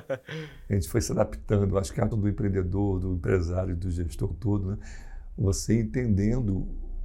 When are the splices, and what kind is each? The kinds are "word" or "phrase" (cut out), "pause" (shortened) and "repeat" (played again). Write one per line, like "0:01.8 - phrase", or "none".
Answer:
0:02.1 - word
0:04.3 - word